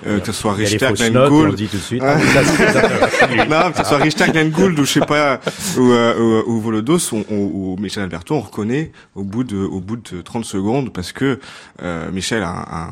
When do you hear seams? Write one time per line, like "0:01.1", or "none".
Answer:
none